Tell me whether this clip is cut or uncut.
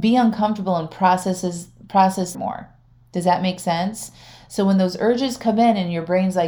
cut